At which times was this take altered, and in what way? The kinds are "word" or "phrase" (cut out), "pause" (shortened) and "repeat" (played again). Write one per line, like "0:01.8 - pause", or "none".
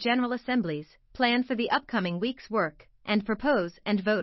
none